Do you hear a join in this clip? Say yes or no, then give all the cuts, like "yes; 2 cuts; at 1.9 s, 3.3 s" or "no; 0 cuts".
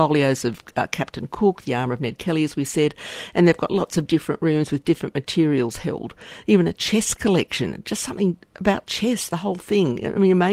no; 0 cuts